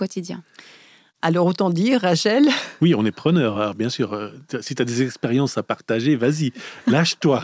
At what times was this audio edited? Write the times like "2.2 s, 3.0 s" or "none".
none